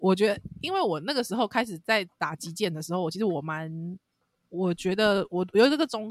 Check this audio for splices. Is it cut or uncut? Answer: uncut